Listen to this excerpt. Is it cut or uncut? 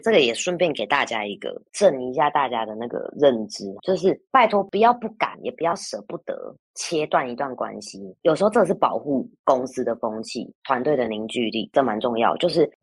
cut